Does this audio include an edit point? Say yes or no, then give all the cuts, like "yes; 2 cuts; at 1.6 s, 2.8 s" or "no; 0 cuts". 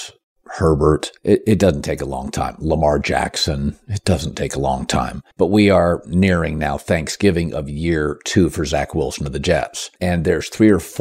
yes; 3 cuts; at 1.2 s, 5.3 s, 10.0 s